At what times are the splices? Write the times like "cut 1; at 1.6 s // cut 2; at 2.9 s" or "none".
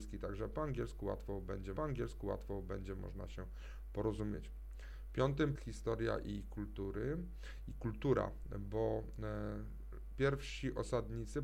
cut 1; at 1.8 s // cut 2; at 5.6 s